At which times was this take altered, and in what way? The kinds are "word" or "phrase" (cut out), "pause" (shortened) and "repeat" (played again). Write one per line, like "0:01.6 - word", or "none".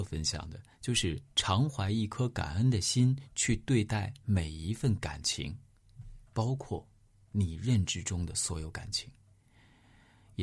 none